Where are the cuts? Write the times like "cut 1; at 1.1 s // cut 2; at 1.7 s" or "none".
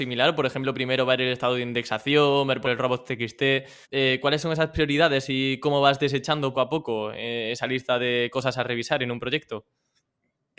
cut 1; at 2.6 s // cut 2; at 3.8 s // cut 3; at 6.5 s